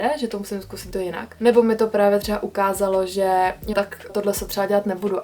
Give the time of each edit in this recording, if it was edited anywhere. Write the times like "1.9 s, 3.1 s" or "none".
0.9 s, 3.7 s, 4.1 s

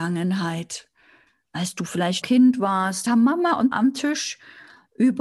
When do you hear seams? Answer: 2.2 s, 3.1 s, 3.7 s

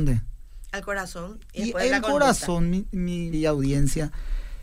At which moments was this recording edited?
3.3 s

